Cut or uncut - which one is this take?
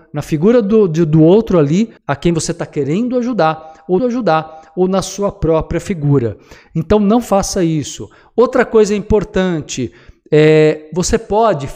cut